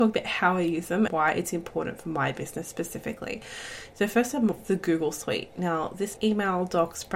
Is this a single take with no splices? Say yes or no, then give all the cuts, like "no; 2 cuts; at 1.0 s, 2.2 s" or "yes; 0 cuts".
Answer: no; 3 cuts; at 1.1 s, 4.6 s, 6.2 s